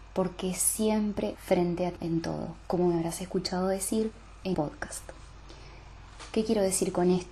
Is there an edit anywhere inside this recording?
yes; 3 cuts; at 1.3 s, 2.0 s, 4.5 s

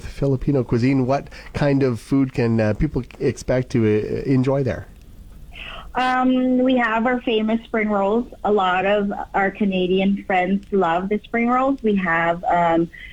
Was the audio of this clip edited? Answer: no; 0 cuts

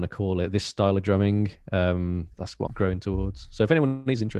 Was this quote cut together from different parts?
yes; 2 cuts; at 2.3 s, 2.7 s

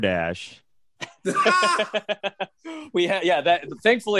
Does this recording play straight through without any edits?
yes; 0 cuts

